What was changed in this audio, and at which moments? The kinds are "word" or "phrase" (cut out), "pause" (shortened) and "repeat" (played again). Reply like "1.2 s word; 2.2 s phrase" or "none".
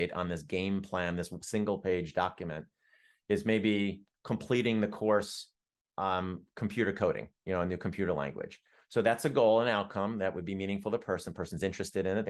none